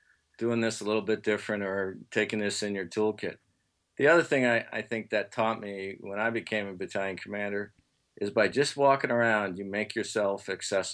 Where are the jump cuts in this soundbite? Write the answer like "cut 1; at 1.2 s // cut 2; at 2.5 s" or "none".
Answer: none